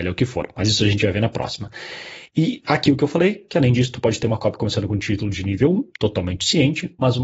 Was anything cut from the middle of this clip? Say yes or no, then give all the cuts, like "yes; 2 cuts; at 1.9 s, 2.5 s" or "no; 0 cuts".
no; 0 cuts